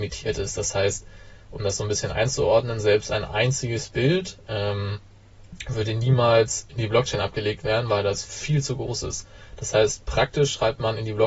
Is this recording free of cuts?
yes; 0 cuts

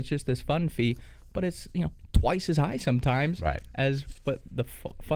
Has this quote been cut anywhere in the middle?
no; 0 cuts

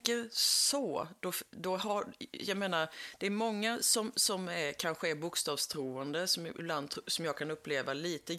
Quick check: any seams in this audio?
no; 0 cuts

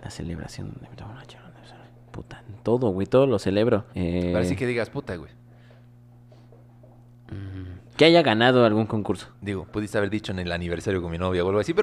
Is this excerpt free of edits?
no; 4 cuts; at 1.8 s, 3.9 s, 7.9 s, 9.3 s

